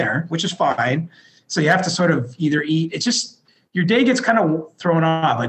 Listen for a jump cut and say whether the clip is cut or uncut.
uncut